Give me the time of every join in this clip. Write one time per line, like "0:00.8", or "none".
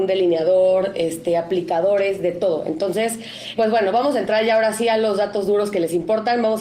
0:03.6

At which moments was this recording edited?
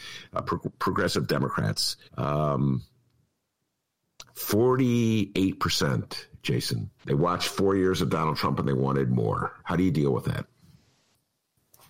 0:02.1
0:07.0
0:09.6

